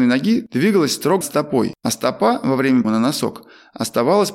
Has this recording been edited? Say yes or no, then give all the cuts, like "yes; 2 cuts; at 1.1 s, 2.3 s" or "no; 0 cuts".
yes; 2 cuts; at 1.2 s, 2.8 s